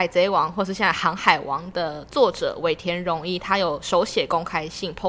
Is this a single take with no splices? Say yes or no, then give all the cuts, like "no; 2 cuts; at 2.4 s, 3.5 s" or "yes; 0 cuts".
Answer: yes; 0 cuts